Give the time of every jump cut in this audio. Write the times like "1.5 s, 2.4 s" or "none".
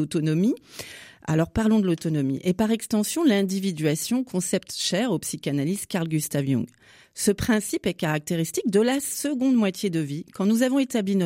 none